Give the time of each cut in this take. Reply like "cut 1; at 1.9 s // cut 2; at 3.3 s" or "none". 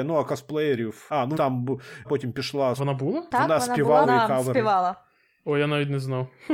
cut 1; at 1.3 s // cut 2; at 2.0 s // cut 3; at 2.8 s // cut 4; at 4.0 s